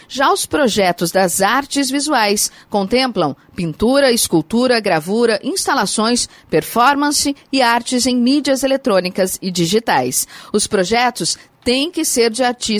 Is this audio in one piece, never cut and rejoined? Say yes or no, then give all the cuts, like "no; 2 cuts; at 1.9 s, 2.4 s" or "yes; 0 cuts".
yes; 0 cuts